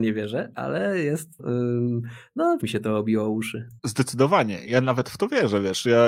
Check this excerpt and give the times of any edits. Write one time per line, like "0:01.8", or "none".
0:01.4
0:02.6
0:03.8